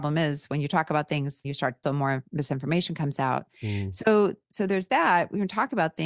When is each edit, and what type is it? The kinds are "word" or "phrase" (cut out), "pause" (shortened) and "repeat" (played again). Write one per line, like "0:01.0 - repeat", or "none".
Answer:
0:01.4 - word
0:01.8 - word